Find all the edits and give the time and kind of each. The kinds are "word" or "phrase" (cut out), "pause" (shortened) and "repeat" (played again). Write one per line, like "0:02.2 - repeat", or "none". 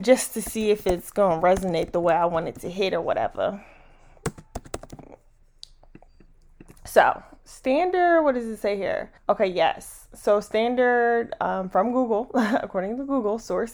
0:09.2 - pause